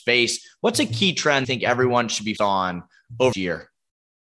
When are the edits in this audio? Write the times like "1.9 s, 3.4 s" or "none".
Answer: 1.4 s, 2.4 s, 3.3 s